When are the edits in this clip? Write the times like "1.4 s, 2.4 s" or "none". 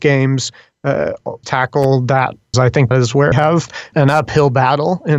1.4 s, 2.5 s, 2.9 s, 3.3 s, 3.9 s